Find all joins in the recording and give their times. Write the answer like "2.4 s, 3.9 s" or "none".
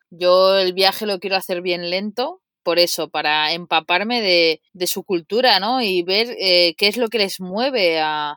4.7 s